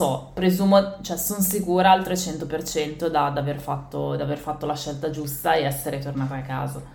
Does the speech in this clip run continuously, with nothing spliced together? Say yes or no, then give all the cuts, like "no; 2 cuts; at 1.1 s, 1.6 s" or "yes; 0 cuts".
yes; 0 cuts